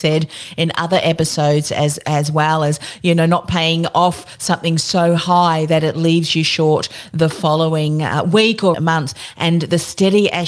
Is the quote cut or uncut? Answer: cut